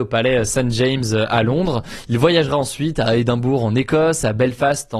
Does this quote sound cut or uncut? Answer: uncut